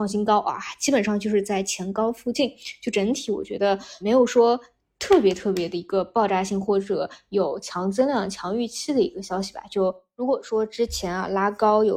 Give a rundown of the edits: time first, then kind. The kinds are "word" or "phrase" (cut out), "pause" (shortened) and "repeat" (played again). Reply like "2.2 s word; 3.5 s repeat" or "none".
4.0 s word